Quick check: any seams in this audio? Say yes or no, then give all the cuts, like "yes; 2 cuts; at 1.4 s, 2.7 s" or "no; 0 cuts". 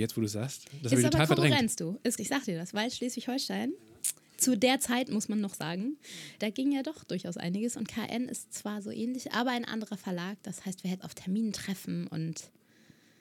yes; 3 cuts; at 2.2 s, 6.4 s, 11.0 s